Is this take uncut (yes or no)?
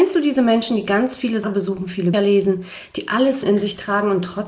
no